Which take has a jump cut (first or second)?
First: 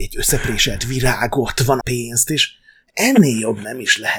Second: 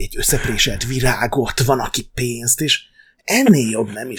first